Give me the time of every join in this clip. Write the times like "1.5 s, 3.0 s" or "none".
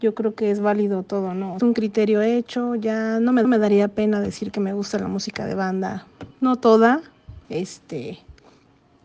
1.6 s, 3.4 s, 6.3 s, 7.4 s